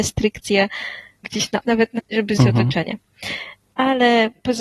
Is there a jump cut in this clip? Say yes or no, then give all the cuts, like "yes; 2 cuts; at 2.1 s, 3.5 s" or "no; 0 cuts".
yes; 4 cuts; at 1.2 s, 1.6 s, 2.0 s, 2.4 s